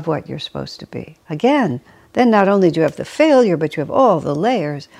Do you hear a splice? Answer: yes; 1 cut; at 1.2 s

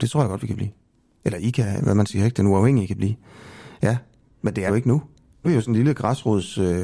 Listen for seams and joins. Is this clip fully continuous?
no; 3 cuts; at 1.8 s, 4.7 s, 5.4 s

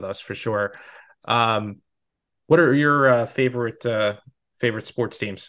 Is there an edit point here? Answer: no; 0 cuts

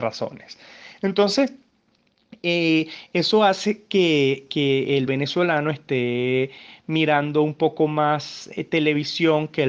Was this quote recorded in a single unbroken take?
yes; 0 cuts

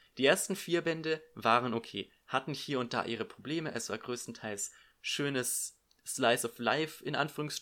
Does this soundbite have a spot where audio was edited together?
no; 0 cuts

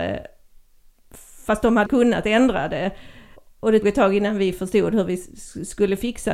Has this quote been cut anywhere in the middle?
yes; 3 cuts; at 1.9 s, 3.4 s, 3.8 s

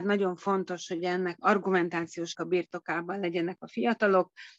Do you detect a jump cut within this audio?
yes; 2 cuts; at 1.4 s, 2.3 s

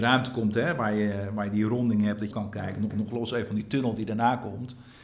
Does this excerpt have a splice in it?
yes; 2 cuts; at 2.3 s, 2.9 s

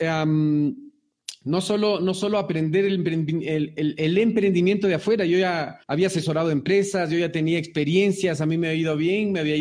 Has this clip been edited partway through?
yes; 1 cut; at 5.8 s

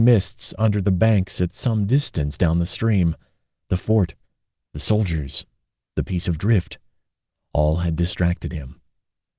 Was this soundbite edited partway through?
no; 0 cuts

